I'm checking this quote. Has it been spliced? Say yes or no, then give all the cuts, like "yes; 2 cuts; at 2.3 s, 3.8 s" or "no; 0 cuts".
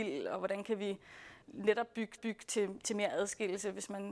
yes; 2 cuts; at 1.4 s, 2.2 s